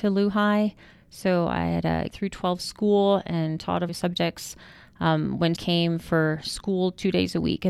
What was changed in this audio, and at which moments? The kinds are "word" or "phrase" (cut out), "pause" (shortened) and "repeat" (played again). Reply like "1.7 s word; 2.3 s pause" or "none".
2.1 s word; 3.9 s word; 5.6 s word